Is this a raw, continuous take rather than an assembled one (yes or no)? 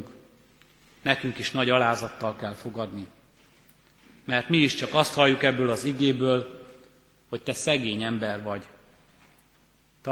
yes